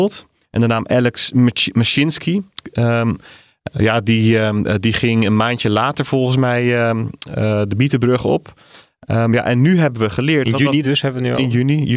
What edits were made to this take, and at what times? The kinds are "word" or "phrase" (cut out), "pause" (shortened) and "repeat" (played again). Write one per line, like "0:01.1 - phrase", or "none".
none